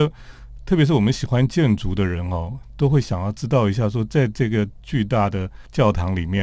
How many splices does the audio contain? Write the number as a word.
zero